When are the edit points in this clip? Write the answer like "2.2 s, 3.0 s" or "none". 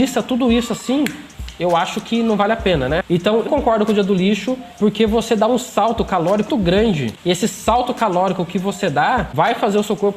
3.5 s, 6.5 s